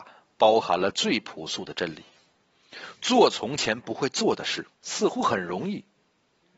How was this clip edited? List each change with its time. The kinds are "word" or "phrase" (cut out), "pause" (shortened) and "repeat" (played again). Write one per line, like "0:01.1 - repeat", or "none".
0:04.7 - pause